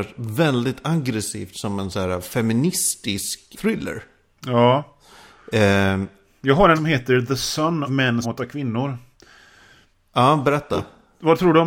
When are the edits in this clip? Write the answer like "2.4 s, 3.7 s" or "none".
3.5 s, 6.8 s, 7.9 s, 8.2 s